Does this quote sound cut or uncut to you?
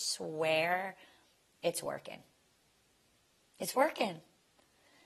uncut